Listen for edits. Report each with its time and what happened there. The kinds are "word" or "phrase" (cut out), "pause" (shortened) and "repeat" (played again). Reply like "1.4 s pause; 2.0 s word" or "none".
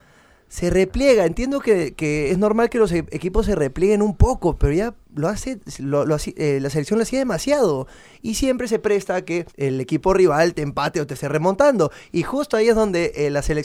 5.0 s pause; 9.5 s pause